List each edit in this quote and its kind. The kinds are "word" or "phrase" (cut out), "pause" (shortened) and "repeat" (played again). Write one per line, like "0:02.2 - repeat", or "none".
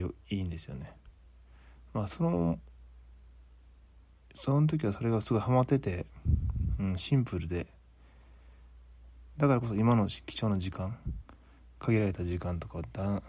none